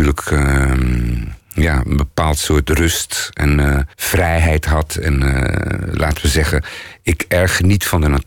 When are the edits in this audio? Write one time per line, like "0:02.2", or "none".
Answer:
0:01.4
0:03.9